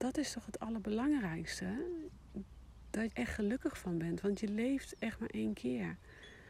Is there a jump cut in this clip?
yes; 1 cut; at 3.1 s

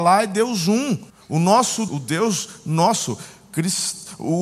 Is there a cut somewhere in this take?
yes; 2 cuts; at 1.1 s, 1.9 s

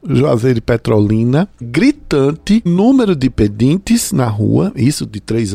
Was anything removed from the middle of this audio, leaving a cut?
yes; 2 cuts; at 1.6 s, 2.7 s

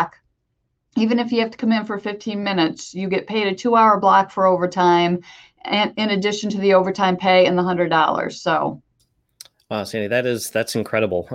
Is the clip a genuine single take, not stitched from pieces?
yes; 0 cuts

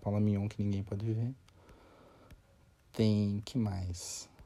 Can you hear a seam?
no; 0 cuts

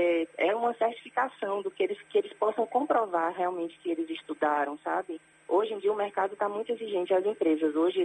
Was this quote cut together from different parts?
no; 0 cuts

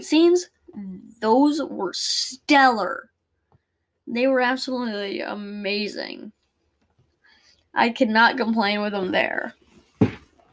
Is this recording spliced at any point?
no; 0 cuts

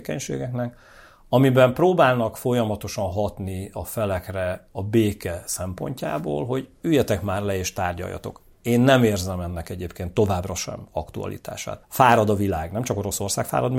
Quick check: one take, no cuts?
no; 1 cut; at 11.8 s

